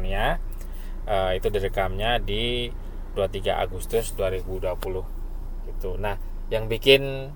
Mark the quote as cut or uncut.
uncut